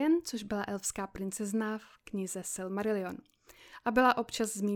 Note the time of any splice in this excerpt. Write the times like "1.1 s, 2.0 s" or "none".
none

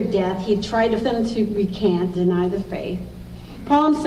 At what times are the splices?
1.0 s, 2.1 s

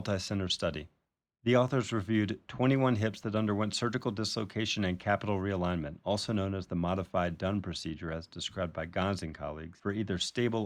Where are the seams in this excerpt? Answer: none

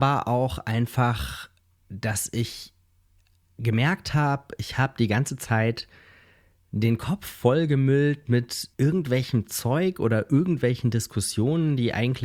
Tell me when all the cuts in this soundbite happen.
8.7 s

